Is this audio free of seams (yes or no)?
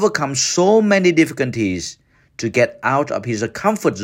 yes